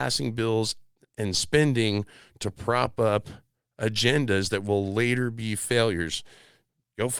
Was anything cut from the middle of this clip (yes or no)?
no